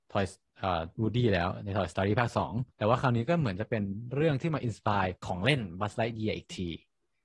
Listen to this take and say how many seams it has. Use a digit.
2